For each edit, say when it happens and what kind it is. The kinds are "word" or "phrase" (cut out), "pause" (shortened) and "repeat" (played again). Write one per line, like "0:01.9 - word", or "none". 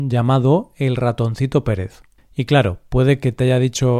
0:02.2 - pause